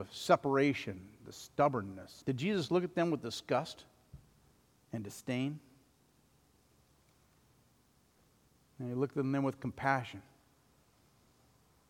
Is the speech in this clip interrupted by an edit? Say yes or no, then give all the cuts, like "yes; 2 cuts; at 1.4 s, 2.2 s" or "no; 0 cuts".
yes; 1 cut; at 2.2 s